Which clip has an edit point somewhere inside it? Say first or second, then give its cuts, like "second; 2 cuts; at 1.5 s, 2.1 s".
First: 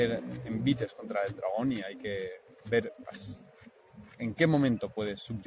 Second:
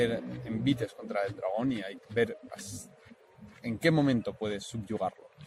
second; 1 cut; at 2.0 s